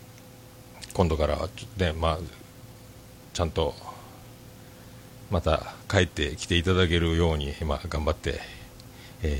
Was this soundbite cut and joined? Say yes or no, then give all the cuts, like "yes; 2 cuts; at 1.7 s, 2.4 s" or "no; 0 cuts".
no; 0 cuts